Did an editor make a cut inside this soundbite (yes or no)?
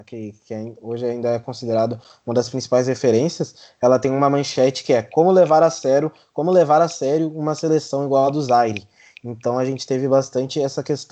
no